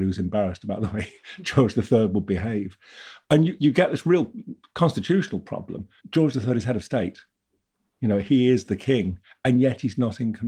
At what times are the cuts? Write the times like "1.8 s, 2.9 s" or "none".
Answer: 3.6 s, 6.0 s